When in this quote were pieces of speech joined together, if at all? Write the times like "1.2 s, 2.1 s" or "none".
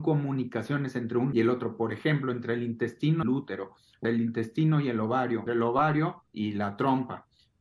1.3 s, 3.2 s, 4.0 s, 5.5 s, 6.3 s